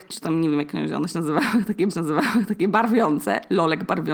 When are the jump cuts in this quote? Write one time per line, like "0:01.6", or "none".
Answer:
0:01.9